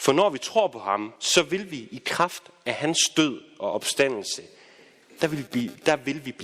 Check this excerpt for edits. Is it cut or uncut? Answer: cut